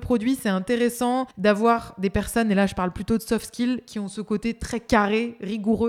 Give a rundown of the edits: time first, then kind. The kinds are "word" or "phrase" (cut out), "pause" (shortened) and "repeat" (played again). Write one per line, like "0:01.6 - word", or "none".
0:01.3 - pause